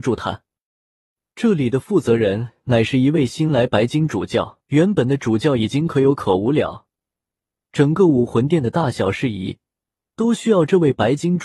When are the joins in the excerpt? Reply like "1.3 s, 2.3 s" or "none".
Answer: 4.6 s